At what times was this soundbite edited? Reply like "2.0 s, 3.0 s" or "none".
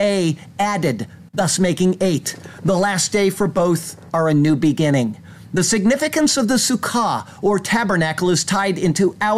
1.3 s